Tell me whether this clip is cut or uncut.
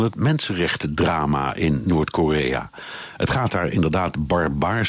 uncut